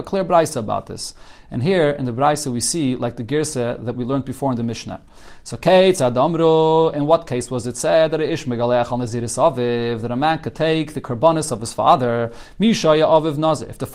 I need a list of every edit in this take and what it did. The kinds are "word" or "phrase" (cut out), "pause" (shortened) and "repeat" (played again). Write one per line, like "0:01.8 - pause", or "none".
none